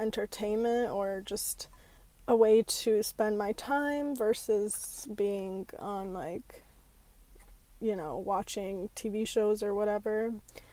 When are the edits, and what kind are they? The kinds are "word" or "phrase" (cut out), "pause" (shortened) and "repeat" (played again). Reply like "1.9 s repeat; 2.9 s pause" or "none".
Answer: none